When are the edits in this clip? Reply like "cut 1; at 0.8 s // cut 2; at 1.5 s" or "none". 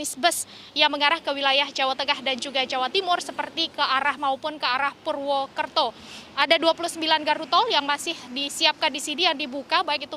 cut 1; at 4.2 s